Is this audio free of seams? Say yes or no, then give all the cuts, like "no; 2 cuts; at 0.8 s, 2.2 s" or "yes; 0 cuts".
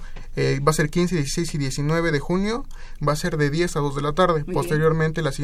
yes; 0 cuts